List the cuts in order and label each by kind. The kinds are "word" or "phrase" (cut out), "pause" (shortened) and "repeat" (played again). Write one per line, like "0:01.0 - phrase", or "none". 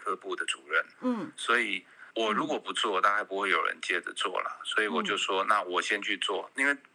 0:02.1 - pause